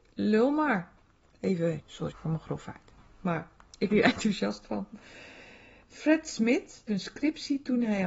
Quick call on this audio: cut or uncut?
cut